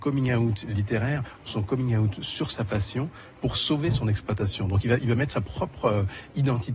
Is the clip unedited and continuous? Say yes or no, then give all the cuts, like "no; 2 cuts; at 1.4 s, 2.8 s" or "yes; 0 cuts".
yes; 0 cuts